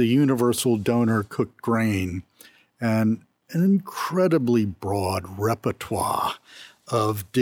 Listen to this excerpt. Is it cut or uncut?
uncut